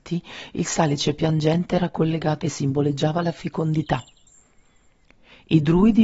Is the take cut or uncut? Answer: cut